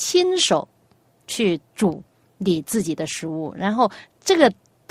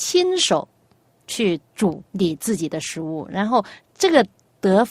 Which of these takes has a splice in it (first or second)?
second